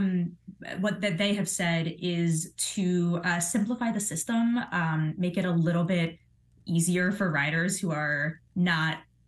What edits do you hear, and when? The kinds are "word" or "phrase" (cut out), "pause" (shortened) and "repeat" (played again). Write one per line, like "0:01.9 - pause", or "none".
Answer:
none

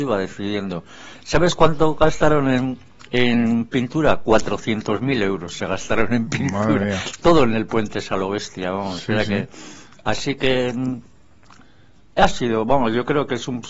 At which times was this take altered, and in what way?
none

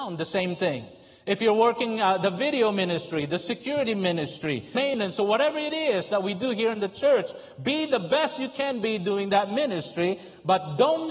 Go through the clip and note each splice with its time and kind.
0:04.7 - phrase

